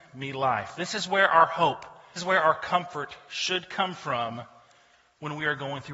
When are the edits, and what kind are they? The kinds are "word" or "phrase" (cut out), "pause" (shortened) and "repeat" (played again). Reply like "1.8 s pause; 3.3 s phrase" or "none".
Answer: 2.2 s word